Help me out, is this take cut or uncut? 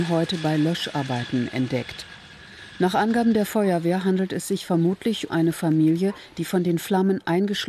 cut